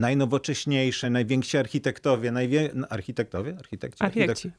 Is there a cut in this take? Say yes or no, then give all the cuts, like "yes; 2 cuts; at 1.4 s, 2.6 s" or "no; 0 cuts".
no; 0 cuts